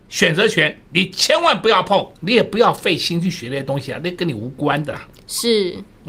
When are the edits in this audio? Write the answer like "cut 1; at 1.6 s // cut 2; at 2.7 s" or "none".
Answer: cut 1; at 2.2 s